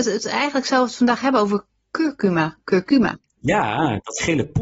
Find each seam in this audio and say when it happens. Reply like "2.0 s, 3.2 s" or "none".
3.2 s